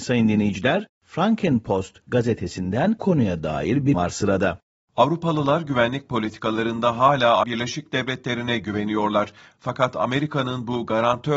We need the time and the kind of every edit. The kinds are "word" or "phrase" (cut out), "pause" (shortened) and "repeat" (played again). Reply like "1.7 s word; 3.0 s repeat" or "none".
3.0 s word; 3.9 s word; 7.4 s word